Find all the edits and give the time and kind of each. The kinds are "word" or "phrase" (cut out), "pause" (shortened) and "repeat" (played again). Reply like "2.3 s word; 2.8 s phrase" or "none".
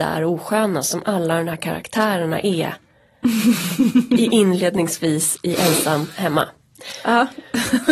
none